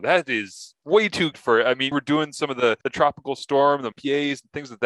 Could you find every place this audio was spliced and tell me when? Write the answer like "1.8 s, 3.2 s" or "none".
1.3 s, 1.9 s, 2.8 s, 3.9 s